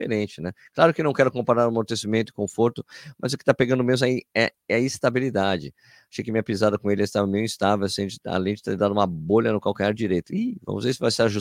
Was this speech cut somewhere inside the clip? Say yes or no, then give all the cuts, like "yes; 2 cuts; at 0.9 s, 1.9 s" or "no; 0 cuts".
no; 0 cuts